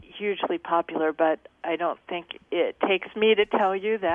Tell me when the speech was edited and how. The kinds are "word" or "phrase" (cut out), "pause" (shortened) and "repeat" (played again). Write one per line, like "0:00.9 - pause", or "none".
none